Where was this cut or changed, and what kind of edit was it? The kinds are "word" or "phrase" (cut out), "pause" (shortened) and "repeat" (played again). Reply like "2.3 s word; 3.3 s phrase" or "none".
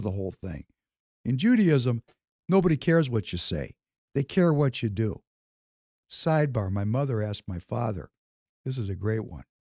none